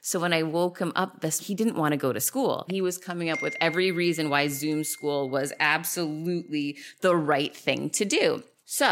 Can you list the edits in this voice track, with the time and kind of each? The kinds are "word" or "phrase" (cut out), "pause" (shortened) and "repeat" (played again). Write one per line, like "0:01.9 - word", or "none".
0:01.4 - word
0:02.7 - word